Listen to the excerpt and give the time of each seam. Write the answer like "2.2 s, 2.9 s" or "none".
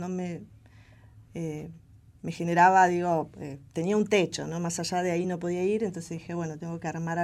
none